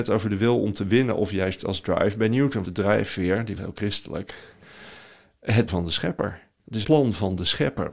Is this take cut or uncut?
cut